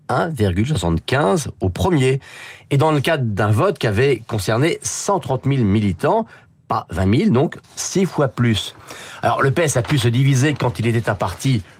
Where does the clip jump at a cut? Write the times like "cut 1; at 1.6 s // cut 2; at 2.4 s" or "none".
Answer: none